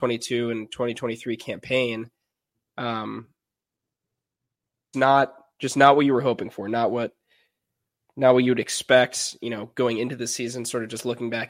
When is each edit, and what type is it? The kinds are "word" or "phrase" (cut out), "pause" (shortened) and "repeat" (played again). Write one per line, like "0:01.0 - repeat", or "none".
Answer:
0:04.9 - word